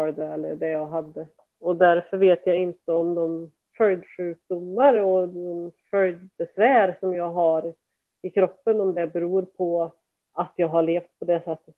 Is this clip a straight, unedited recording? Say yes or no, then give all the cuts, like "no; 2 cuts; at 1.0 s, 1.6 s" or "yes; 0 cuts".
yes; 0 cuts